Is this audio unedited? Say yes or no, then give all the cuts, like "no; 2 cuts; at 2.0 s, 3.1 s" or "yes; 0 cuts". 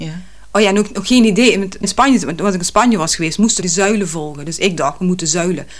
no; 2 cuts; at 1.8 s, 3.6 s